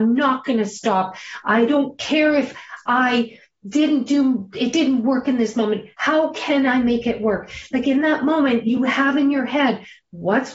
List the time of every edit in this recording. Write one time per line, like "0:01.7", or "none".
none